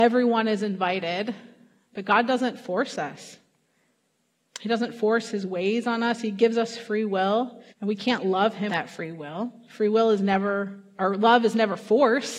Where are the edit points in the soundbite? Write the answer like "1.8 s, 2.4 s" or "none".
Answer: 7.7 s, 8.7 s